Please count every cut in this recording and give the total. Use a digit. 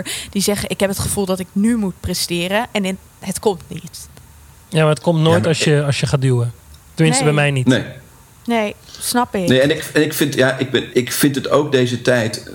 1